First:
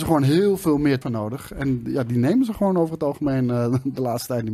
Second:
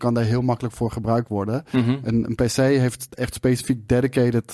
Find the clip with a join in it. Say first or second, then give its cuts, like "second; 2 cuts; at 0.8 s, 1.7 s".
first; 1 cut; at 1.0 s